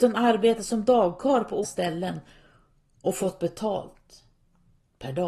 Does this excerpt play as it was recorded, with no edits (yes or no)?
no